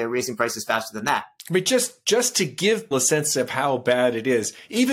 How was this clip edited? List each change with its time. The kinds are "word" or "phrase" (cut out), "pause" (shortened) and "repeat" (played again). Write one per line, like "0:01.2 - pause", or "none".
0:02.9 - word